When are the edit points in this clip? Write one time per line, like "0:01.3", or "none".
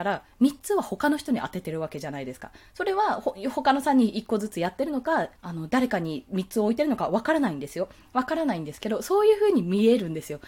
0:05.4